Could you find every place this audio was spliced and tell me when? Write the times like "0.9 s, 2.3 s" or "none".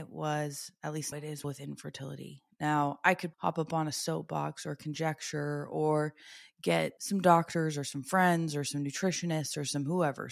1.1 s, 1.4 s, 3.3 s, 7.0 s